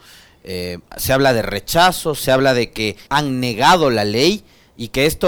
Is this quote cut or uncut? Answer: cut